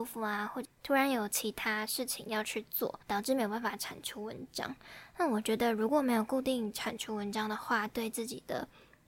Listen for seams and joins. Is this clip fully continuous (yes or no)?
no